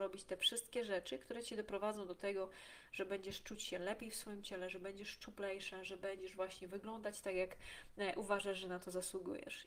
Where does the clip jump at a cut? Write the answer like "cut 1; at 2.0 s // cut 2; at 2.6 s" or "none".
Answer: none